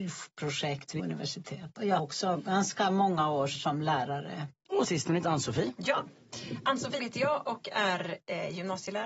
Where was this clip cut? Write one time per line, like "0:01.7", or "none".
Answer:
0:01.0
0:02.0
0:03.6
0:04.8
0:05.2
0:07.0